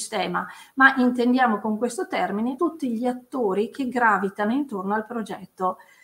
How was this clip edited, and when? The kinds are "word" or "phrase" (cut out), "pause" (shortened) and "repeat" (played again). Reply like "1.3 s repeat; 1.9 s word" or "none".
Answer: 2.6 s word